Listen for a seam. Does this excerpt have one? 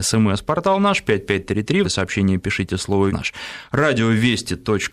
yes; 2 cuts; at 1.8 s, 3.1 s

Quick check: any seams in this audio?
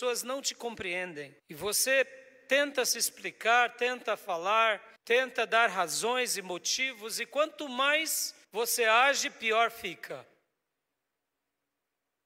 yes; 3 cuts; at 1.4 s, 5.0 s, 8.4 s

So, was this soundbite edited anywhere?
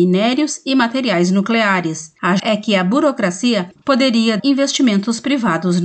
yes; 2 cuts; at 2.4 s, 4.4 s

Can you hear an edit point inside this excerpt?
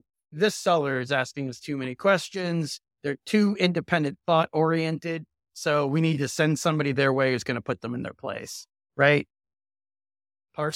no; 0 cuts

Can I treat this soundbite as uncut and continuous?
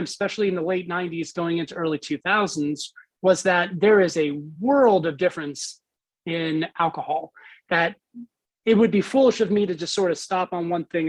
yes; 0 cuts

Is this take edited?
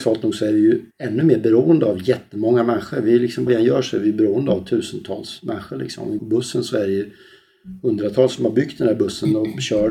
yes; 3 cuts; at 0.9 s, 3.5 s, 6.2 s

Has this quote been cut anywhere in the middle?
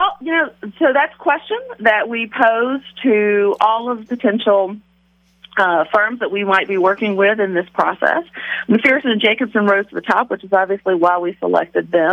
yes; 1 cut; at 4.1 s

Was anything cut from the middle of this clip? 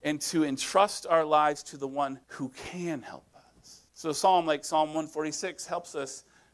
yes; 2 cuts; at 2.2 s, 3.9 s

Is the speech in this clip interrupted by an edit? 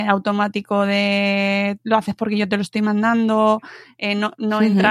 no; 0 cuts

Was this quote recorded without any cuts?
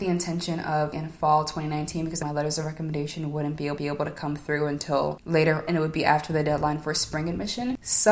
no; 4 cuts; at 0.9 s, 2.2 s, 3.8 s, 5.7 s

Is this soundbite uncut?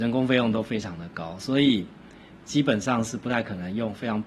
yes; 0 cuts

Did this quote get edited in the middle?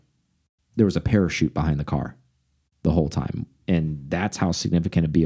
no; 0 cuts

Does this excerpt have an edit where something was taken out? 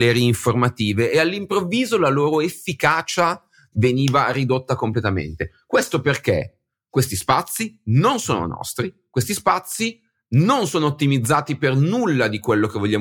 no; 0 cuts

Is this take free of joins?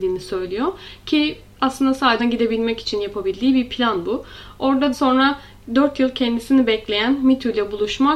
no; 2 cuts; at 2.2 s, 4.9 s

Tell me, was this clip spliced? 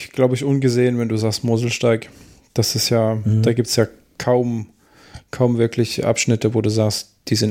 no; 0 cuts

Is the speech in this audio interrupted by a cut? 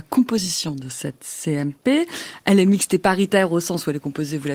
no; 0 cuts

